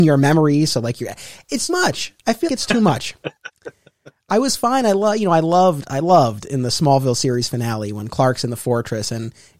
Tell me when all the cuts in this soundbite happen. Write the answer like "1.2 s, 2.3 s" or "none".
1.7 s, 2.5 s